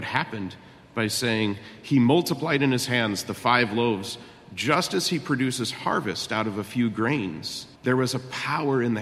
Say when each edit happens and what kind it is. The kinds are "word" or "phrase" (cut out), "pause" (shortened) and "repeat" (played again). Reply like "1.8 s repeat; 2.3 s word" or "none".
7.8 s pause